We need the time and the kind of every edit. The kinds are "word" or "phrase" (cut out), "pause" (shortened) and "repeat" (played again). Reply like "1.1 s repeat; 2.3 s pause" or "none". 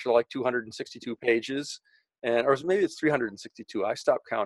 none